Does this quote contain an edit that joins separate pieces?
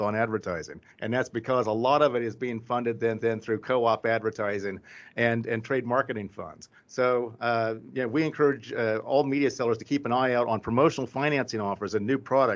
yes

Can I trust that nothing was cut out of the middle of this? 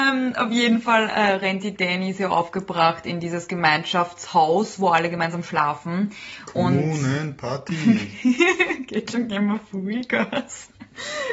yes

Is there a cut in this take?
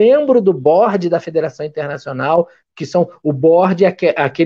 no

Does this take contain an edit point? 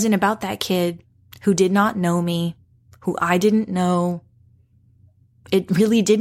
no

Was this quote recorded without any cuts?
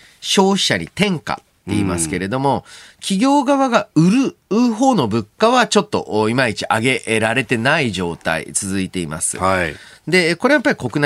yes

